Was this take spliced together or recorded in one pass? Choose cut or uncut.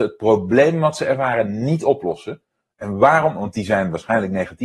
uncut